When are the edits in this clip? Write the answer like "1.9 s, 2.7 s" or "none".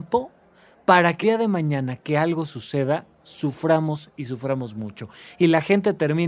1.2 s